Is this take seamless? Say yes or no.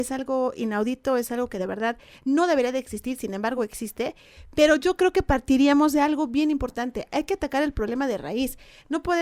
yes